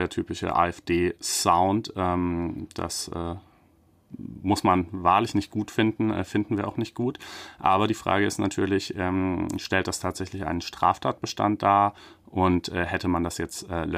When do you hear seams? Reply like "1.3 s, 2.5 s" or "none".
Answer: none